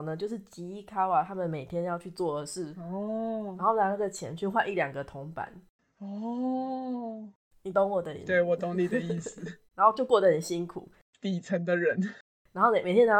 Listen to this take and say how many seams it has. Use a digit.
1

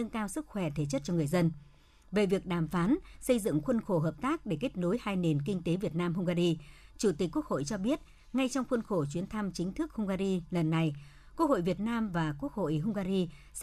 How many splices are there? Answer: 0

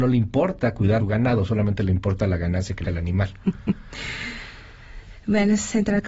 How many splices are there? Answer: 2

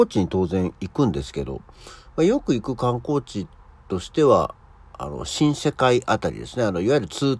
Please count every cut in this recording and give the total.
0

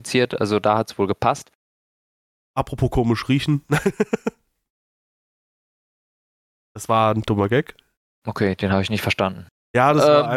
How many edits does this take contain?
0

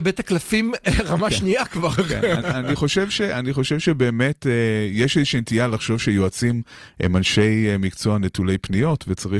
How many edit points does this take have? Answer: 1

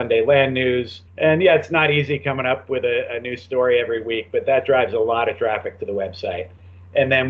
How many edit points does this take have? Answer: 1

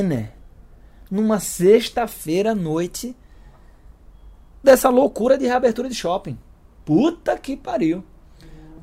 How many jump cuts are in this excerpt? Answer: 1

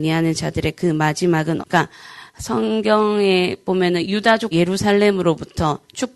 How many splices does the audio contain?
2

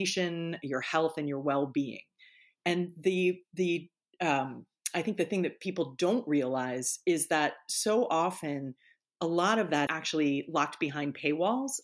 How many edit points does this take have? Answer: 1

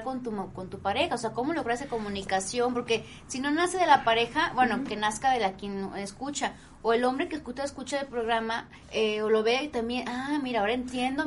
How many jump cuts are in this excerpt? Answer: 1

